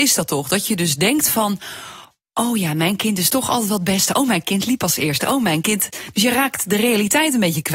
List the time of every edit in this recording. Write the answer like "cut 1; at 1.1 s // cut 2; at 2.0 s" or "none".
none